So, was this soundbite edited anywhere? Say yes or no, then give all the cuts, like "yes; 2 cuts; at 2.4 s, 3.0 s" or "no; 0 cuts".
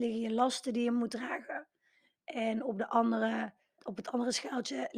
yes; 1 cut; at 3.8 s